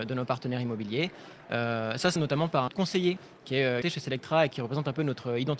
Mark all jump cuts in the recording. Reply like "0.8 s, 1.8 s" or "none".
2.2 s, 2.7 s, 3.2 s, 3.8 s, 4.5 s